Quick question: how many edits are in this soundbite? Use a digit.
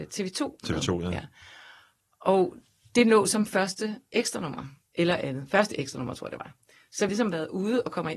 1